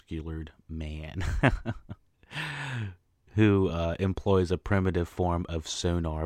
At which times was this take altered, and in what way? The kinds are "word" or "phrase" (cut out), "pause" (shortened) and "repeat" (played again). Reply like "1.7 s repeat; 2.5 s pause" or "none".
none